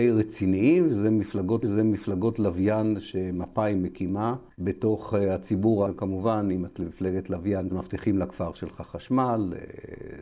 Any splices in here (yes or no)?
yes